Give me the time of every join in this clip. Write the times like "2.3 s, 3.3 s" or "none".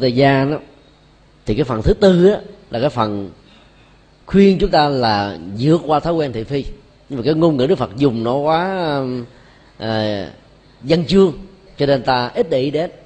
none